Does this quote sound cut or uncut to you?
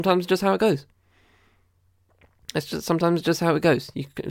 uncut